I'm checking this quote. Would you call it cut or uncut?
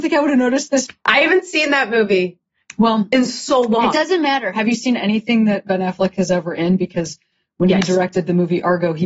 uncut